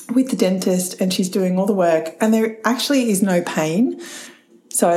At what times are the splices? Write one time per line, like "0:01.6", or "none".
none